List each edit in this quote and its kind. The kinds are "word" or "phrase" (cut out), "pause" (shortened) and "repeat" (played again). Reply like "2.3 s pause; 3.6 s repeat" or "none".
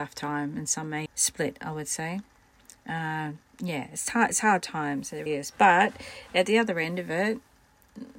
1.1 s word; 3.4 s pause; 5.3 s word